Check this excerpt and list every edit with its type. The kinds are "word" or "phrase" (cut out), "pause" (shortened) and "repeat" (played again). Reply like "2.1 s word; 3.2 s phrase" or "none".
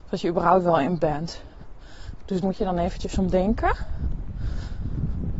1.0 s word; 2.4 s word